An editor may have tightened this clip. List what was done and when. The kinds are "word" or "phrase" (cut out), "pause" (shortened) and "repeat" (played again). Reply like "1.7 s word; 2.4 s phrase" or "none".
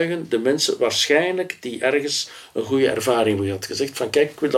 none

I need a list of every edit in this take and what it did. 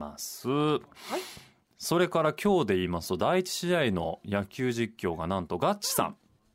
none

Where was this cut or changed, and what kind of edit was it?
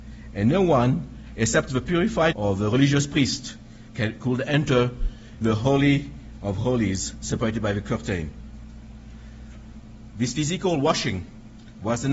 2.3 s word; 5.4 s word

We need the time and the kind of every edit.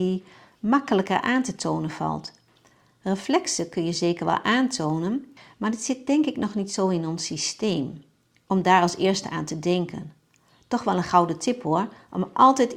none

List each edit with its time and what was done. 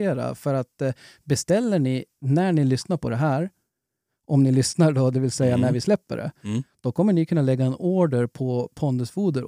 none

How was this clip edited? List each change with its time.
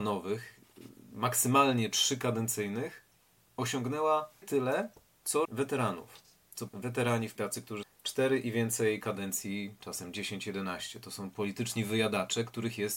4.4 s word; 5.4 s word; 6.7 s word; 7.4 s phrase; 7.8 s word

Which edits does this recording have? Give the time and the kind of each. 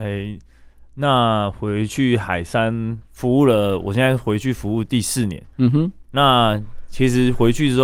3.1 s pause; 5.5 s pause

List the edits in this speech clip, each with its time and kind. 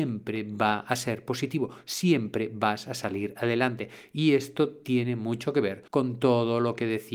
5.9 s pause

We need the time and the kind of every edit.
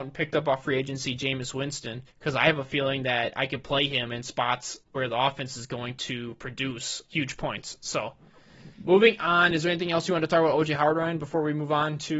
2.1 s pause; 4.8 s pause; 7.1 s word; 8.7 s pause; 9.5 s word

